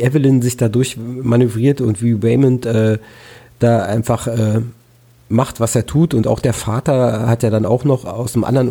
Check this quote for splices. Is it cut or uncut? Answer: uncut